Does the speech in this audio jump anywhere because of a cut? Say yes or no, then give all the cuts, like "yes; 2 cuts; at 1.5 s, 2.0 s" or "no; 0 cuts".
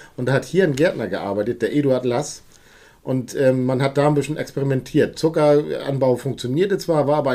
no; 0 cuts